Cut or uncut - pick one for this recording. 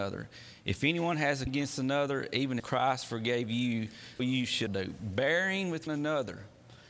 cut